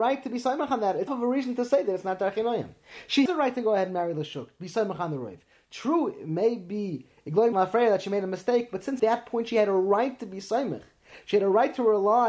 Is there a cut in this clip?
yes; 4 cuts; at 1.1 s, 3.3 s, 7.5 s, 9.0 s

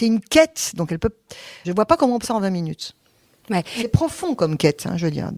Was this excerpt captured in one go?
no; 2 cuts; at 1.6 s, 2.2 s

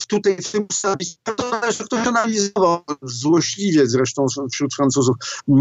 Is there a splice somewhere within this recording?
yes; 1 cut; at 1.2 s

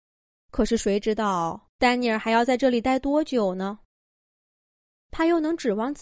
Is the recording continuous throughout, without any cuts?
no; 1 cut; at 1.7 s

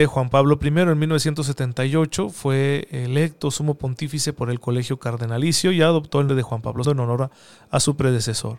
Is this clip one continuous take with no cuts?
no; 2 cuts; at 6.3 s, 6.8 s

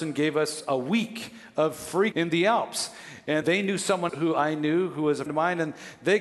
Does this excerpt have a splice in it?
yes; 4 cuts; at 2.1 s, 3.4 s, 4.1 s, 5.3 s

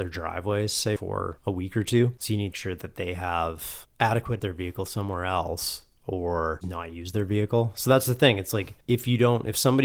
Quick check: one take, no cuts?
no; 4 cuts; at 2.5 s, 4.4 s, 6.6 s, 8.8 s

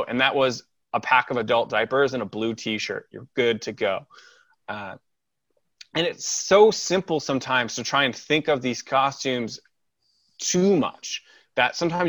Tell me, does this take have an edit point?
no; 0 cuts

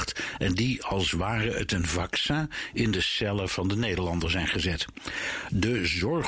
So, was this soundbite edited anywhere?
no; 0 cuts

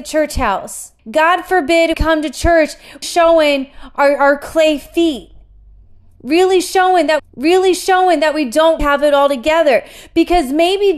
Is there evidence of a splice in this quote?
yes; 5 cuts; at 1.0 s, 1.9 s, 3.0 s, 7.2 s, 8.8 s

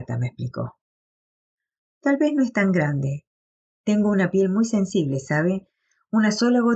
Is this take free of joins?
yes; 0 cuts

